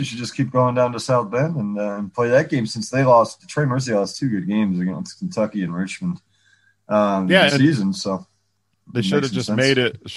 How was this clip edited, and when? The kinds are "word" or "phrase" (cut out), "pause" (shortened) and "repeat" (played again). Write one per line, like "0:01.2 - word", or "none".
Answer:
0:07.5 - phrase